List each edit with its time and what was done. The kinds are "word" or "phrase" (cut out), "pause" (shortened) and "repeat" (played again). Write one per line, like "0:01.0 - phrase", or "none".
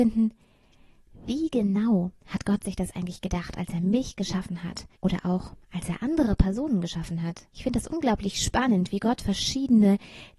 0:02.2 - pause
0:04.9 - pause
0:07.5 - pause